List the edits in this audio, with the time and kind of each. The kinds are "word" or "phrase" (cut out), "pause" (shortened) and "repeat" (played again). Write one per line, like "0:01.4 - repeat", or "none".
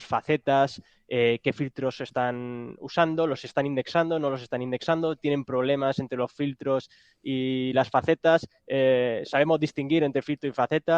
none